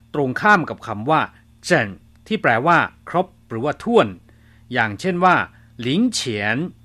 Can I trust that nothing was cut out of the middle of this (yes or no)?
yes